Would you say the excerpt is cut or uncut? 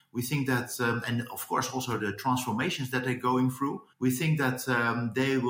cut